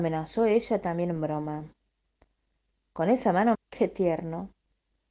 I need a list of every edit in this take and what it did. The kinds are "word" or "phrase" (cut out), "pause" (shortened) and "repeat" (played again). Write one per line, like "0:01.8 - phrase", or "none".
0:03.5 - word